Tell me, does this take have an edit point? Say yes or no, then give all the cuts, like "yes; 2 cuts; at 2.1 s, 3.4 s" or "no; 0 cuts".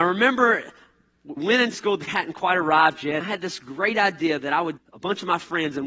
yes; 5 cuts; at 1.4 s, 1.7 s, 2.1 s, 3.2 s, 4.8 s